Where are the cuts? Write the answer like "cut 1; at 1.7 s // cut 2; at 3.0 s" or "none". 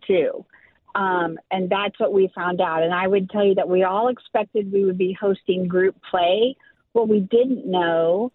none